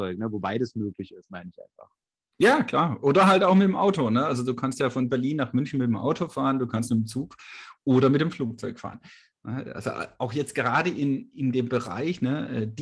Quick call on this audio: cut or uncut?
uncut